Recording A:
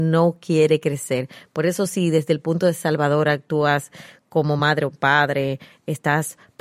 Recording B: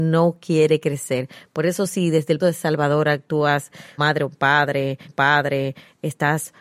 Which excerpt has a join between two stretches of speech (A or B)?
B